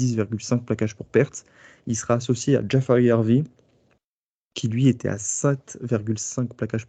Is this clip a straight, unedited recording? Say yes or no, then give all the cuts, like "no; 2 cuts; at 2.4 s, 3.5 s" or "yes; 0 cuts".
yes; 0 cuts